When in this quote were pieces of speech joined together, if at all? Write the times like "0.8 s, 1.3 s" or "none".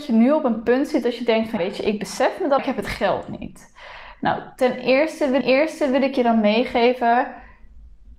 1.6 s, 2.6 s, 5.4 s